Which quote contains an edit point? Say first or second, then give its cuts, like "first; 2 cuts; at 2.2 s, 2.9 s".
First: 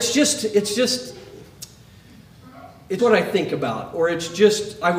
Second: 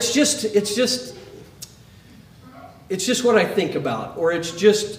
first; 1 cut; at 3.0 s